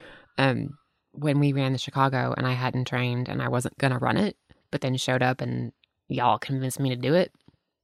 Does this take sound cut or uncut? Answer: uncut